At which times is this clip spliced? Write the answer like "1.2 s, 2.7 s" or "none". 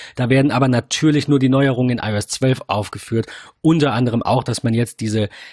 none